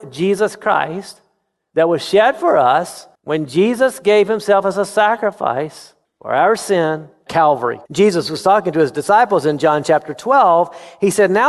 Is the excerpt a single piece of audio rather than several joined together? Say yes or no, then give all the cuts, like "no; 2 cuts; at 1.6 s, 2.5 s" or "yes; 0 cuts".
no; 4 cuts; at 3.1 s, 6.0 s, 7.3 s, 7.9 s